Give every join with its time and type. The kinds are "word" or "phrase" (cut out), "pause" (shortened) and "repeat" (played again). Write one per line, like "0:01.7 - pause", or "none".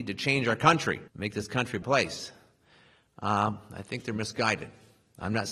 0:01.1 - pause
0:01.8 - word